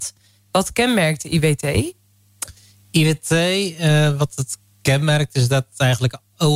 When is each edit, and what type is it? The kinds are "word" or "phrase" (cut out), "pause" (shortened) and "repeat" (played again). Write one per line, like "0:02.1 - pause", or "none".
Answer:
none

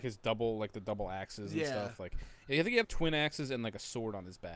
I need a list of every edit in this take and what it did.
0:02.8 - phrase

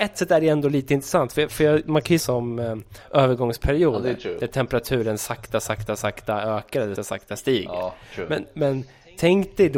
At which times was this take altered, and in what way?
0:02.2 - phrase
0:07.0 - word

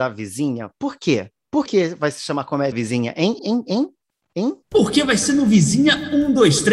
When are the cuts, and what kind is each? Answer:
0:01.7 - word
0:02.7 - word
0:03.4 - word
0:04.6 - pause

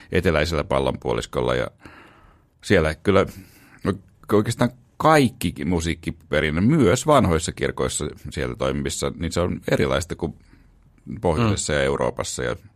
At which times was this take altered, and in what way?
none

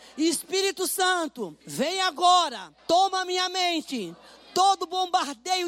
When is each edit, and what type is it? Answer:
0:01.6 - pause
0:02.8 - pause

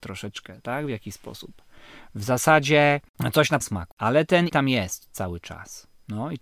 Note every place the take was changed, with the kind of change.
0:03.6 - word
0:04.5 - word

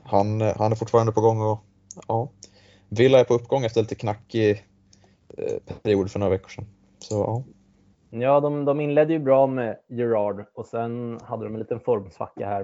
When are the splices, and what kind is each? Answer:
none

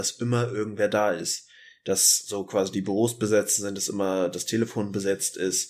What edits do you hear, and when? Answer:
none

